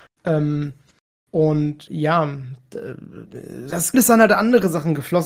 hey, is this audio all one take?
no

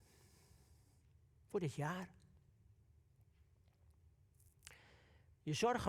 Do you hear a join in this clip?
no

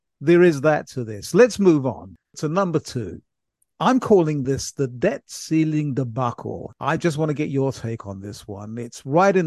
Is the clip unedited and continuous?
yes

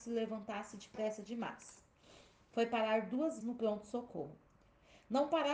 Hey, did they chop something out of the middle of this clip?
yes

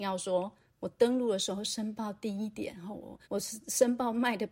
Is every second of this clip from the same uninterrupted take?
no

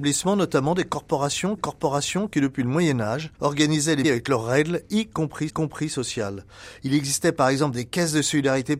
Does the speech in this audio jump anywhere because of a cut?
yes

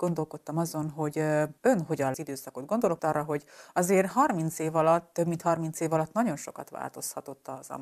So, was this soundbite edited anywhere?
yes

